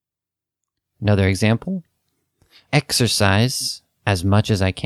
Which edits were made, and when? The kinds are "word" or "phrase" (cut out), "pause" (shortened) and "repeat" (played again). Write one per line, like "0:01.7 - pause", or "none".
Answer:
0:02.7 - word